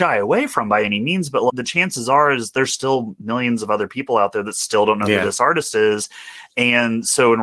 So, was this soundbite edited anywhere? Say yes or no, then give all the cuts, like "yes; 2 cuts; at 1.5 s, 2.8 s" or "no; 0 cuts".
no; 0 cuts